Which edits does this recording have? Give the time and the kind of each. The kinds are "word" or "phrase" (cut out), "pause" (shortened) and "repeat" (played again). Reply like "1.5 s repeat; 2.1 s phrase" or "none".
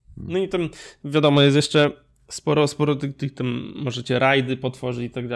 none

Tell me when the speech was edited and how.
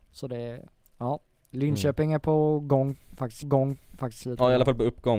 3.4 s repeat

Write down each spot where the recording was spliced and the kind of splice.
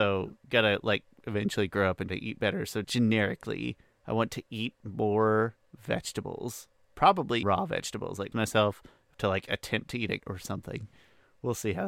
2.1 s word; 2.8 s word; 5.7 s pause; 7.4 s word; 8.3 s word; 9.1 s phrase; 10.2 s word

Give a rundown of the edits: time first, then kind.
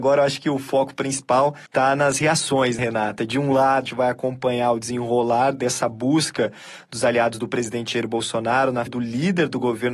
1.7 s pause; 2.8 s word; 3.9 s phrase; 8.9 s word

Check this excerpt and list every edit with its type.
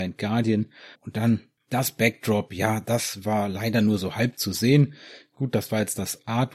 0.9 s pause

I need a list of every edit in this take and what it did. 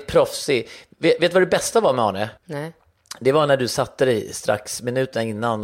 2.4 s pause

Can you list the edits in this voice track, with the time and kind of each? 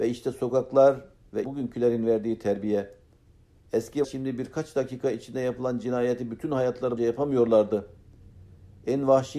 1.4 s word; 4.0 s word; 7.0 s word

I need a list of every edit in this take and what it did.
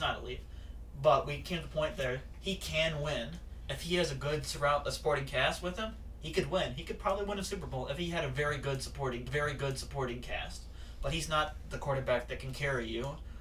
9.3 s repeat

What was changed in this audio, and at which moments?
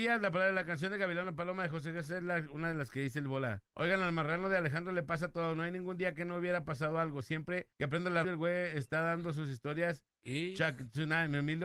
3.7 s pause; 7.7 s pause; 8.2 s word

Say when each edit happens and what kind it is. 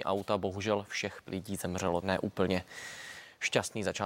1.2 s word; 2.0 s word

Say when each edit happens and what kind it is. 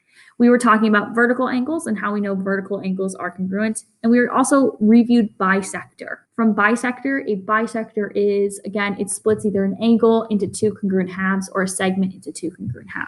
6.3 s pause

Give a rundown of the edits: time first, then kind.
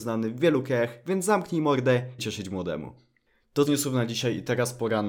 2.2 s phrase; 3.7 s phrase

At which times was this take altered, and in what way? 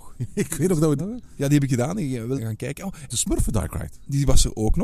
1.0 s phrase; 1.7 s word; 2.4 s word; 3.1 s phrase

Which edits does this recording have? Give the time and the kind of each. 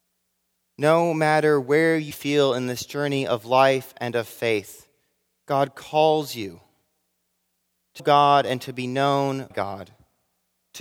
2.1 s word; 8.0 s word; 9.5 s word

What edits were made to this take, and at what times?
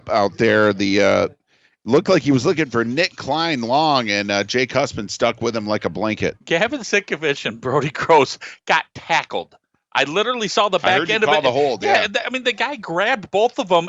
none

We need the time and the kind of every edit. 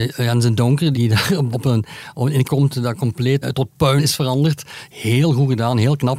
0.9 s word; 1.5 s word; 2.4 s word; 3.4 s word; 4.0 s word

